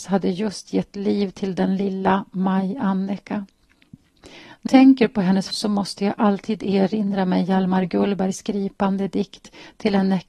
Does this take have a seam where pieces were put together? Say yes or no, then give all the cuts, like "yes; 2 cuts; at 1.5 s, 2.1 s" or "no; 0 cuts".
yes; 2 cuts; at 4.7 s, 5.5 s